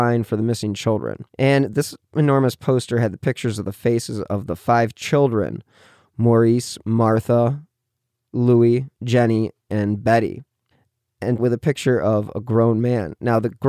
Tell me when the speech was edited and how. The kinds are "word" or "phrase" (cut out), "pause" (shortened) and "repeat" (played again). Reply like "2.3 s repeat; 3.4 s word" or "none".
1.3 s pause; 8.9 s pause; 11.4 s word